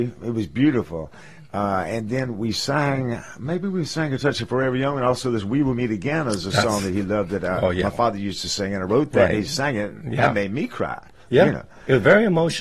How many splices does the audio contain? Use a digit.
0